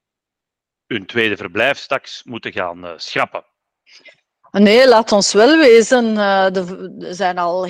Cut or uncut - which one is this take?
uncut